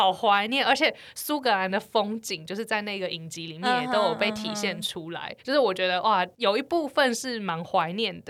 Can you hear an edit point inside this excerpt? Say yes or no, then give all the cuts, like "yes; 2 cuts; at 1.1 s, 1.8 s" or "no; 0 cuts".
yes; 1 cut; at 5.4 s